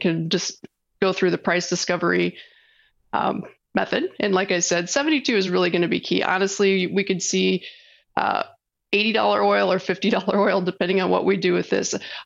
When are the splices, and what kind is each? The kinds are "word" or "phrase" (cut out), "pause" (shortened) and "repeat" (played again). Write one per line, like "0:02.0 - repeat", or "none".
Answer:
none

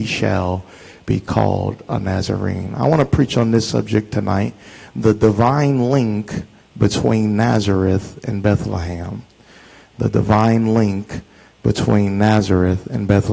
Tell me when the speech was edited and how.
none

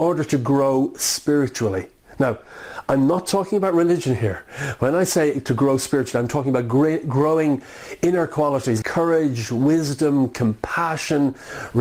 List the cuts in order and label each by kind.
0:08.8 - word

